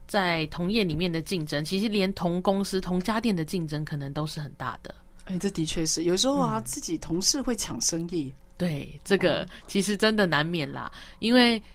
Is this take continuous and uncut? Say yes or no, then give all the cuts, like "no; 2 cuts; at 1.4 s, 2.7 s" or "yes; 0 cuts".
yes; 0 cuts